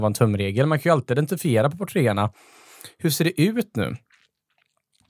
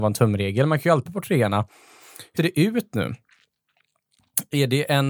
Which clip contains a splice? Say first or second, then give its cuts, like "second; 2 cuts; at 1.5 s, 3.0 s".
second; 2 cuts; at 1.1 s, 2.4 s